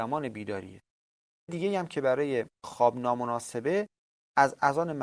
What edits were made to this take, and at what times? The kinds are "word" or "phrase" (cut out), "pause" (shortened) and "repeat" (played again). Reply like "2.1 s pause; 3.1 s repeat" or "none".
1.5 s word